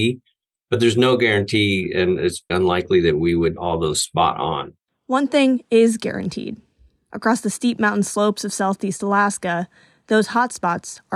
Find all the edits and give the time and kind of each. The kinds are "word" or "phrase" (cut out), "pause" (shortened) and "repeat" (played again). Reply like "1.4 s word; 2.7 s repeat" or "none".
2.5 s word; 3.6 s word